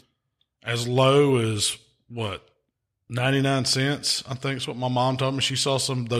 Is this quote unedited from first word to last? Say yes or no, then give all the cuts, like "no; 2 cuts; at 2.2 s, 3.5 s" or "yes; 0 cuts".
yes; 0 cuts